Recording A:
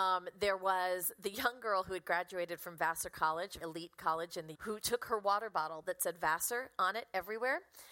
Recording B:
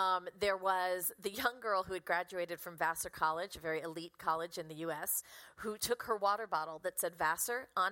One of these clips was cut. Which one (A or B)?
A